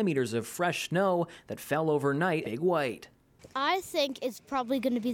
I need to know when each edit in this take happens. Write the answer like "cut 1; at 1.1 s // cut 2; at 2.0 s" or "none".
cut 1; at 2.4 s // cut 2; at 3.5 s